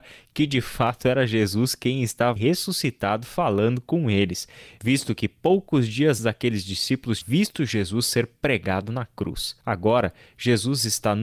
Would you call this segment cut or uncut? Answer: cut